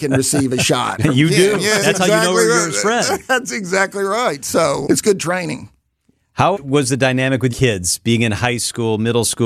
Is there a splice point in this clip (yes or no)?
yes